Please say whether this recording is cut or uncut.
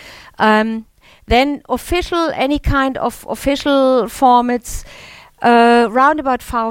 uncut